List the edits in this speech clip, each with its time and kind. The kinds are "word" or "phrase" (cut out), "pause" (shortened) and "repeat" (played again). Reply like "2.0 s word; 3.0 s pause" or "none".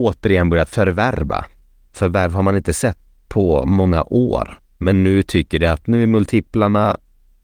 none